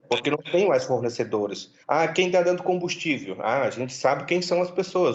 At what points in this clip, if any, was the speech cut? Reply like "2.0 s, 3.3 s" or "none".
1.8 s